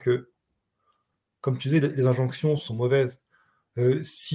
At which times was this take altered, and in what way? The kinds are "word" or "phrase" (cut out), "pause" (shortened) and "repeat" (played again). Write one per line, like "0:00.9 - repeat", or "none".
0:02.6 - word

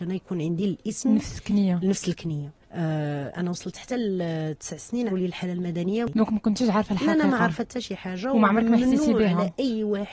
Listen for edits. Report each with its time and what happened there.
0:02.6 - pause
0:05.1 - phrase

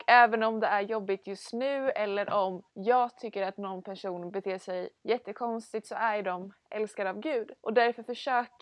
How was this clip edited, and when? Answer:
0:02.7 - pause
0:05.0 - pause
0:07.6 - pause

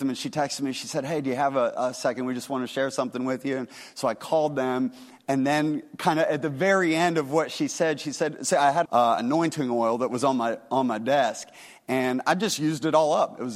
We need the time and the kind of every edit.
0:08.8 - phrase

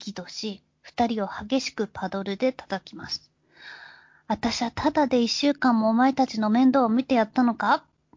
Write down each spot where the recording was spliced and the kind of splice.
none

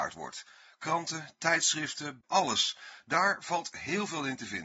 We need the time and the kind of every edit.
0:02.2 - word

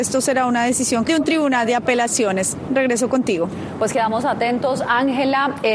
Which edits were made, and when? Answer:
0:01.1 - phrase

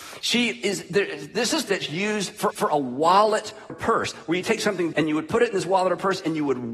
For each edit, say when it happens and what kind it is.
0:01.7 - word
0:02.5 - repeat
0:03.7 - word
0:04.9 - phrase

